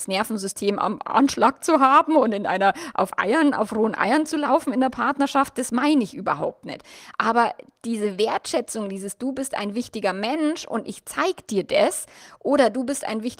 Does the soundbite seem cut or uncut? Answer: uncut